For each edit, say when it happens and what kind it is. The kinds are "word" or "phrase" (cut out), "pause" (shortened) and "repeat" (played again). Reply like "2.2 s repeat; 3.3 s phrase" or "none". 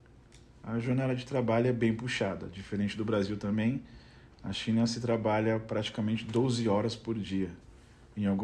none